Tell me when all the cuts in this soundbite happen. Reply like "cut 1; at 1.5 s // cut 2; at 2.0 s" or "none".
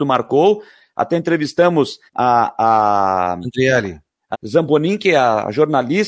cut 1; at 2.1 s // cut 2; at 4.3 s